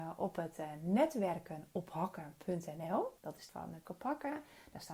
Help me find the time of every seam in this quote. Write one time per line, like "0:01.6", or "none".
0:03.2
0:03.5
0:03.8